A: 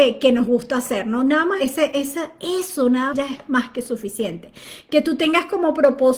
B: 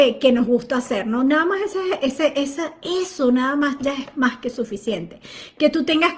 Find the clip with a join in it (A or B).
A